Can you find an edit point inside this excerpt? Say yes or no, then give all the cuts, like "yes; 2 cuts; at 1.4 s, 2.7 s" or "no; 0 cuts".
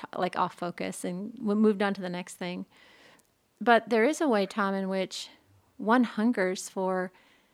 no; 0 cuts